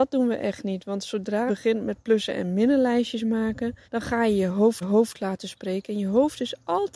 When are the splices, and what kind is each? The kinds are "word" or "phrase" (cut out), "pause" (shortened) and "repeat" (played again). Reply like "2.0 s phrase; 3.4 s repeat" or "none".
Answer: 1.5 s word; 3.8 s pause; 4.8 s repeat

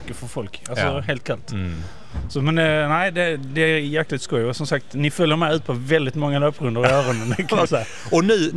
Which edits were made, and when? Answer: 7.7 s word

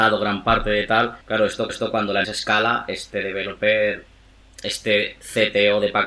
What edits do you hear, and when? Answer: 1.2 s pause; 1.7 s repeat; 2.2 s word

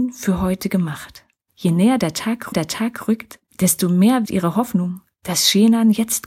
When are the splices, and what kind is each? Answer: 1.3 s pause; 2.5 s repeat; 4.3 s word

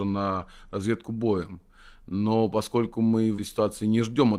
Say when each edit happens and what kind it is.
3.4 s word

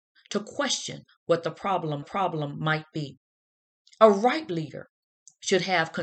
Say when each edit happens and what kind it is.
2.0 s repeat

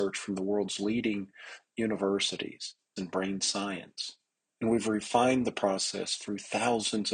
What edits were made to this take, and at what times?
3.0 s phrase; 4.4 s pause

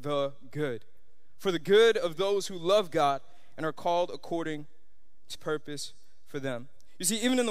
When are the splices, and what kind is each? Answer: 5.3 s word

